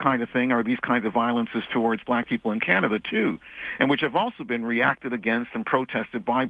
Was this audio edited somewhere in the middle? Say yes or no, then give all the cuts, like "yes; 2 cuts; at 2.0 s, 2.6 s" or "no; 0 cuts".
no; 0 cuts